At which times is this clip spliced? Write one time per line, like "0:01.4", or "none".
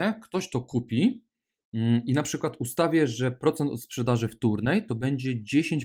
none